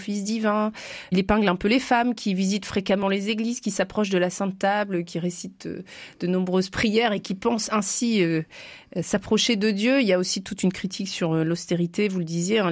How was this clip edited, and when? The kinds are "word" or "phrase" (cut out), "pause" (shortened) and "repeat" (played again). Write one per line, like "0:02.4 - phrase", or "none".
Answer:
none